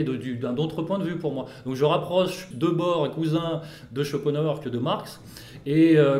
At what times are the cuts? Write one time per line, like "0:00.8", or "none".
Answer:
0:02.5